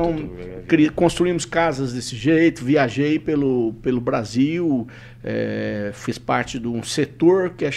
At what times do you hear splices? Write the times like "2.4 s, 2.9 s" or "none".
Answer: none